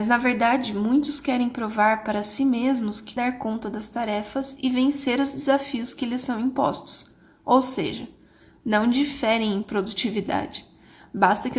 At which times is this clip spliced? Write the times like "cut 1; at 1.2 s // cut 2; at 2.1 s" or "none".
cut 1; at 3.2 s